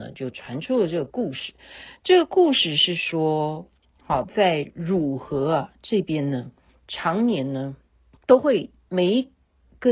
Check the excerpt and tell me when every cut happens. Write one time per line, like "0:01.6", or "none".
0:06.7
0:08.1